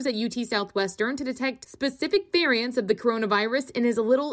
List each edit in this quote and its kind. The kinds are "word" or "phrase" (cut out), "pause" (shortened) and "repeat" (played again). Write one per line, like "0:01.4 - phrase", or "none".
none